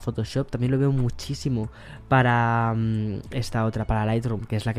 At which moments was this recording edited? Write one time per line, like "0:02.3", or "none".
none